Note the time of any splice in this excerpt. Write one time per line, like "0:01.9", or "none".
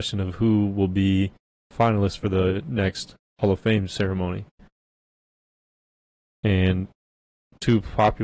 none